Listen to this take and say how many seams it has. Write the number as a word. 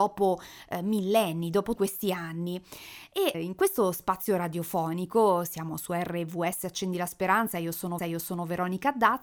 three